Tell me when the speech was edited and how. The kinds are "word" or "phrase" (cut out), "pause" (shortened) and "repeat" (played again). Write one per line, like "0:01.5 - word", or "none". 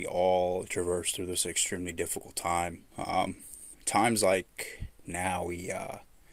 none

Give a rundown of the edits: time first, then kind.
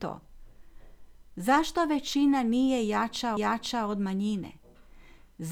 0:03.4 - repeat

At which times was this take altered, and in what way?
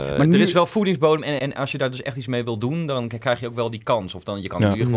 0:01.4 - word

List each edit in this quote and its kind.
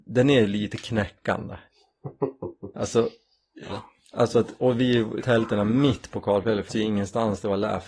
0:03.7 - phrase
0:04.3 - word
0:05.2 - word
0:06.7 - word

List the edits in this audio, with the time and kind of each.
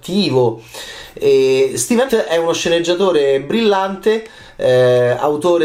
0:02.1 - word

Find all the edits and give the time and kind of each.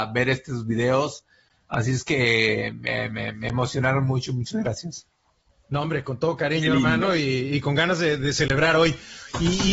none

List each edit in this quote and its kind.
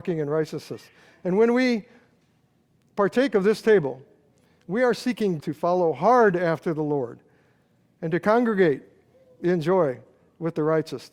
0:05.4 - word

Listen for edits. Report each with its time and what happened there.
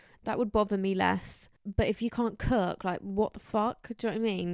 0:01.6 - pause

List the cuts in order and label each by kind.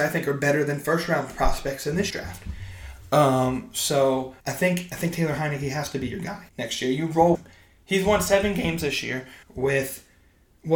0:02.1 - word
0:04.4 - pause
0:06.5 - pause
0:07.3 - word
0:09.4 - pause

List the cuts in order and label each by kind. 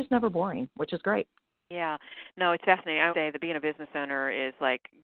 0:01.4 - pause
0:03.1 - word

